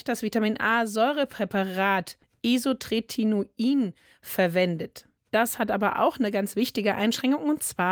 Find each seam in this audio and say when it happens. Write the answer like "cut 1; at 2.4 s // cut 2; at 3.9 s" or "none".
none